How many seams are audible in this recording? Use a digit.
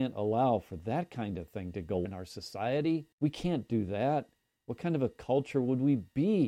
2